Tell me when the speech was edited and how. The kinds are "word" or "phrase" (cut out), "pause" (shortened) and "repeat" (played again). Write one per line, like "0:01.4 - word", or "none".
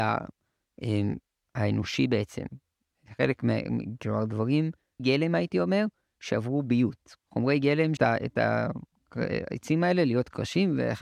0:05.0 - word
0:07.2 - pause
0:08.0 - phrase